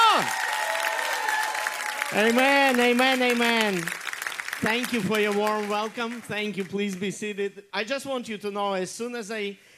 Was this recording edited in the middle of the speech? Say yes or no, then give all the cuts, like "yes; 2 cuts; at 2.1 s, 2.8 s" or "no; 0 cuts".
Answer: no; 0 cuts